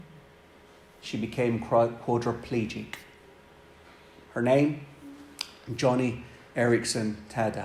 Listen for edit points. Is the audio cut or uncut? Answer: uncut